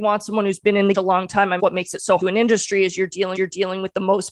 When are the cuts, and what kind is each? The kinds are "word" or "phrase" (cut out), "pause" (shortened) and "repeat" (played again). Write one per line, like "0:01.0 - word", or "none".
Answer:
0:00.9 - phrase
0:01.6 - phrase
0:02.2 - phrase
0:03.4 - repeat